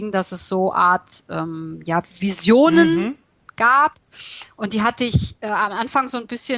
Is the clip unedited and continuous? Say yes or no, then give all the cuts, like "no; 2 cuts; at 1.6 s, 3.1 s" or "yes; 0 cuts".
yes; 0 cuts